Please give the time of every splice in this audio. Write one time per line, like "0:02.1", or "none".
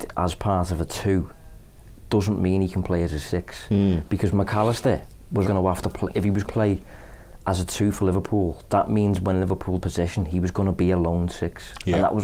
0:05.4
0:06.4
0:09.8